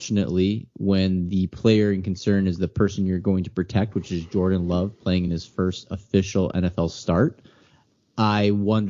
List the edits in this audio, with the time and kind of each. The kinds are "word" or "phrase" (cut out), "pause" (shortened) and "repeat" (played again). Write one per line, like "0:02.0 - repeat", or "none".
none

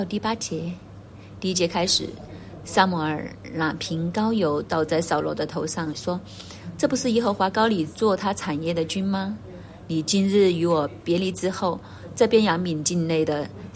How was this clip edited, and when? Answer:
0:05.9 - phrase

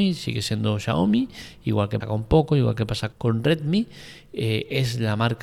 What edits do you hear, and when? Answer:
0:02.0 - word
0:03.1 - word

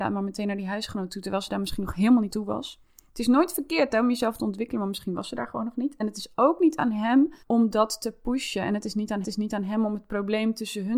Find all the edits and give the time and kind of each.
0:02.3 - word
0:07.4 - pause
0:09.2 - repeat

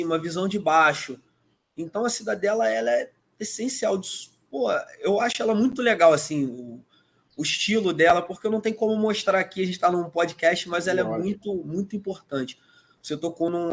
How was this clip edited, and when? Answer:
none

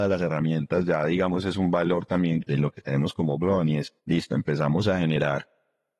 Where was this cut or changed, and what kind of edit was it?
0:04.0 - pause

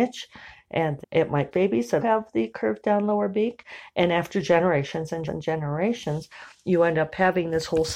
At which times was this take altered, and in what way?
0:01.0 - word
0:01.5 - word
0:02.0 - word
0:05.3 - word

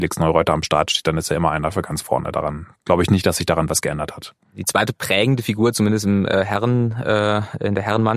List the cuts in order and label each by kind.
none

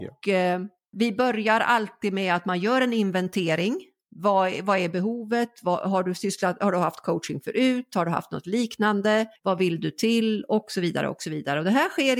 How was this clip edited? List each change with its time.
0:09.4 - pause

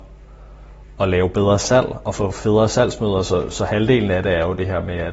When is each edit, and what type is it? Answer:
none

